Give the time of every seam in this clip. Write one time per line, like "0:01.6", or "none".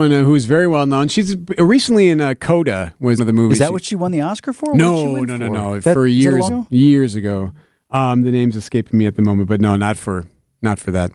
0:03.2
0:06.5

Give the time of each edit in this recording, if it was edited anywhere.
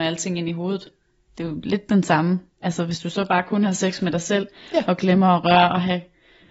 none

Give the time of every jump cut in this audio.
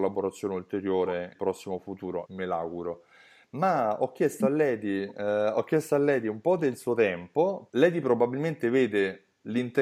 0:01.3
0:02.3
0:07.7

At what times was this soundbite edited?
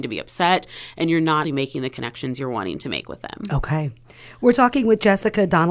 0:01.4

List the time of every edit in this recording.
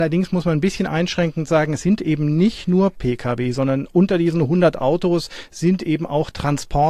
none

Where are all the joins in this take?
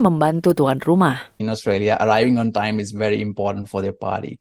0:01.3

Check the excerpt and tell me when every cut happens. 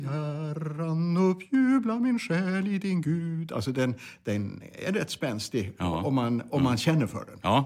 none

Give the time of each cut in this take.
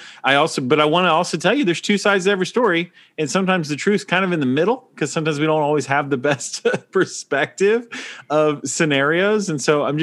none

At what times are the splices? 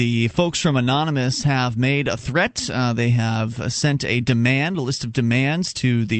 none

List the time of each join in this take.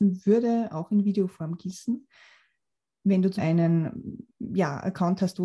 0:03.4

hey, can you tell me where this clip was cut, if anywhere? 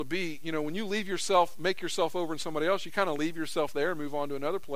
none

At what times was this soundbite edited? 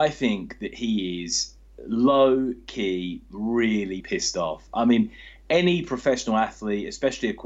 0:04.0

